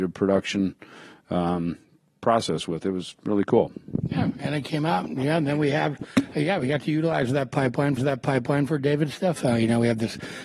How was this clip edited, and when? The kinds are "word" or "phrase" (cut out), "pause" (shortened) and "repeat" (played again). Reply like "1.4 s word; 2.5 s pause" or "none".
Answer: 8.0 s repeat